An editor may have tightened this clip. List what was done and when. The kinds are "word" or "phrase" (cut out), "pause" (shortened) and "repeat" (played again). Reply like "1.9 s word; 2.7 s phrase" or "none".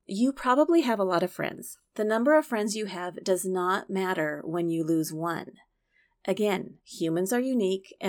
6.8 s pause